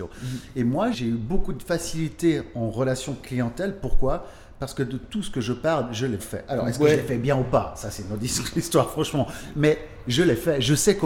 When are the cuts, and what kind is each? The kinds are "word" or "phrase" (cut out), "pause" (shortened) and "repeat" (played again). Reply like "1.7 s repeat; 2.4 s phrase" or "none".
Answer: 0.9 s word; 6.2 s word

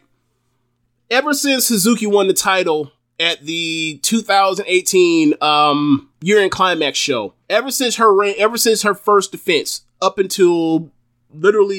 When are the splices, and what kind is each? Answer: 6.1 s pause; 7.4 s pause

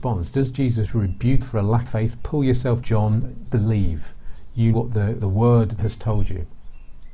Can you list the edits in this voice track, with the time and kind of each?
1.4 s word; 1.9 s word; 2.8 s word; 3.5 s word; 4.7 s word; 5.2 s word; 5.8 s word

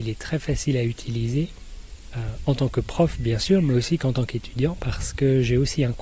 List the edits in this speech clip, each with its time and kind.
none

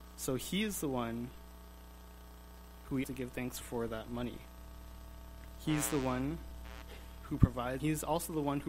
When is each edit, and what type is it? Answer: 3.0 s word; 3.6 s word; 7.8 s word

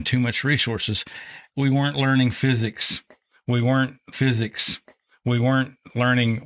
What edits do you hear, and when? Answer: 4.1 s repeat

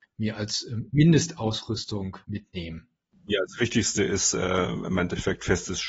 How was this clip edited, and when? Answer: 2.2 s pause

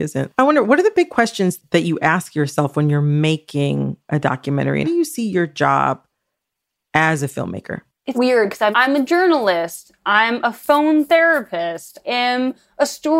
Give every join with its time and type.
4.8 s phrase; 8.1 s word; 8.7 s word; 12.0 s word

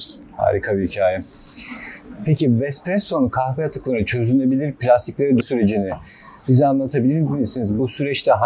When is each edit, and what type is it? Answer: 5.4 s word

